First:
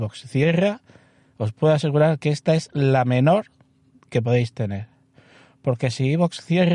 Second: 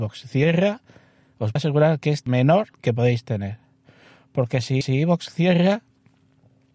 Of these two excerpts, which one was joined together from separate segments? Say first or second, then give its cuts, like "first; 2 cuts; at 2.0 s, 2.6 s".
second; 4 cuts; at 1.6 s, 2.3 s, 2.7 s, 4.8 s